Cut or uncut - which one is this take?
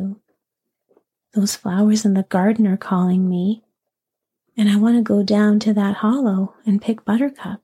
uncut